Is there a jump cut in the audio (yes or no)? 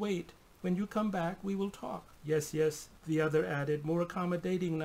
yes